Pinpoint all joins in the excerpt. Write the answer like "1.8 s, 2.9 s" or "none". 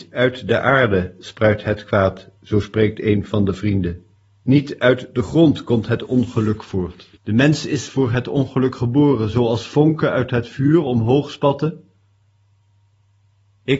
2.4 s, 4.2 s, 7.2 s

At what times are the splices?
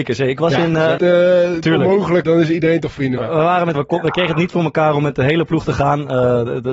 1.0 s, 2.2 s, 3.2 s, 3.7 s

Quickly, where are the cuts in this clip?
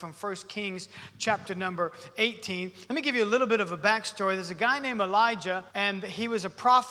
5.7 s

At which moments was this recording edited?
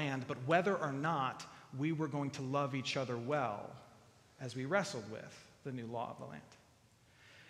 none

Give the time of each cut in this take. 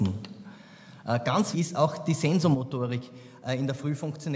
1.5 s

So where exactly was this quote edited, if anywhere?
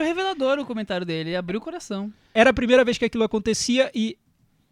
none

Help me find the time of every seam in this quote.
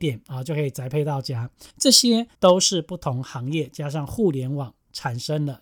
1.7 s, 2.3 s

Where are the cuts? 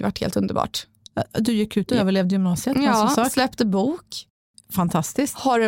1.9 s

